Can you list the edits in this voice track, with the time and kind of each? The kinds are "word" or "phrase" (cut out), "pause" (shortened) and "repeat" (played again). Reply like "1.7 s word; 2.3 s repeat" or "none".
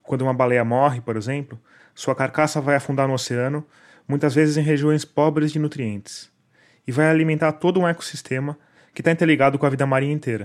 none